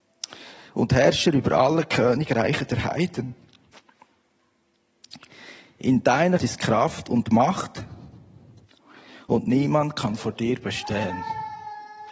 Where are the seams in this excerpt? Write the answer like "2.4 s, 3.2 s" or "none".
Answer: 6.4 s